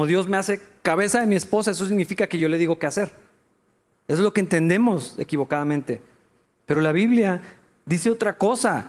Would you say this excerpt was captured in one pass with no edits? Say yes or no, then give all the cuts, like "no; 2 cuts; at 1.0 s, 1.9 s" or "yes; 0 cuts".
yes; 0 cuts